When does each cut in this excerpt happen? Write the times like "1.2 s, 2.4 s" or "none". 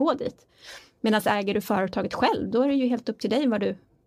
none

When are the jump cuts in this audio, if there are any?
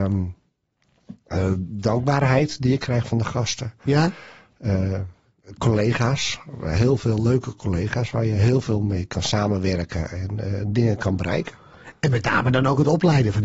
none

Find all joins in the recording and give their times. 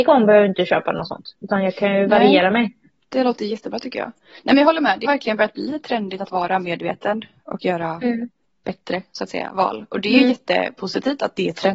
3.0 s, 5.0 s, 8.4 s

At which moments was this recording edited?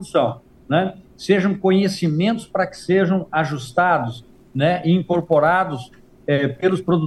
none

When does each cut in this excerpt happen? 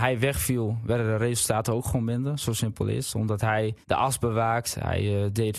3.8 s

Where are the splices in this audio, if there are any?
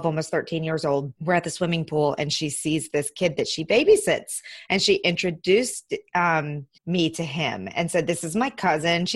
1.2 s, 6.8 s

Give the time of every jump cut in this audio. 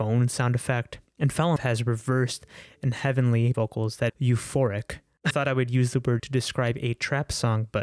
1.6 s, 3.5 s, 4.1 s, 5.3 s, 6.2 s

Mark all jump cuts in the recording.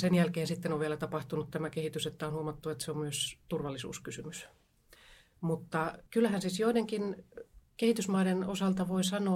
6.1 s

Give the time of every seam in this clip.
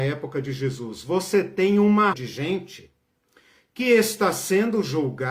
2.1 s

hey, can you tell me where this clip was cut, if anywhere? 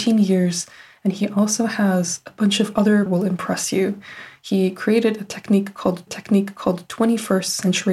3.1 s, 6.1 s

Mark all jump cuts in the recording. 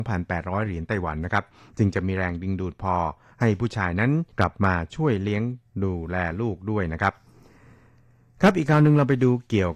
4.3 s

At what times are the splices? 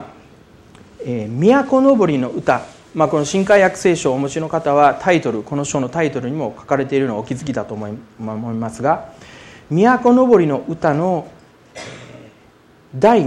none

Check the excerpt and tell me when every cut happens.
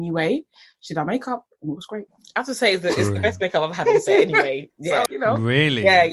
5.1 s

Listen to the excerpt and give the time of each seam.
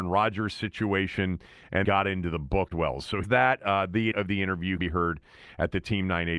1.8 s, 2.7 s, 3.2 s, 4.1 s, 4.8 s

